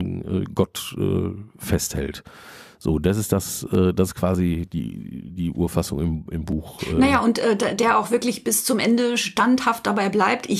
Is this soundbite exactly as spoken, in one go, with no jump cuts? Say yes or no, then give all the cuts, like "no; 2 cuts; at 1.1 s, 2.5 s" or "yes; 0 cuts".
yes; 0 cuts